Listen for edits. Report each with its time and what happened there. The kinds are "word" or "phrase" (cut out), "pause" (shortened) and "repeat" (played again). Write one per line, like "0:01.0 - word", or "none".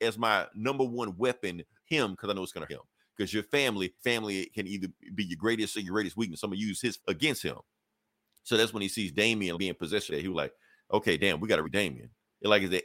0:01.8 - word
0:02.7 - word
0:04.0 - word
0:05.7 - word
0:07.0 - word
0:09.5 - word
0:10.1 - word
0:11.6 - word

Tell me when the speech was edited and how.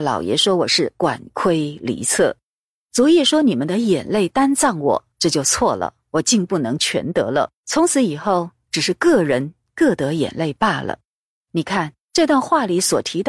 0:02.6 - pause
0:05.1 - pause
0:07.6 - pause
0:11.2 - pause

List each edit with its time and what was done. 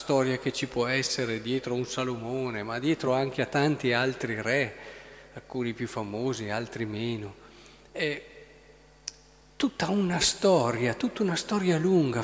none

